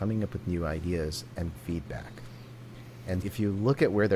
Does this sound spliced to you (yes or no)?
yes